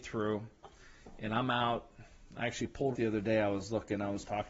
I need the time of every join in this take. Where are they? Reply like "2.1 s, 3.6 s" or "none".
2.9 s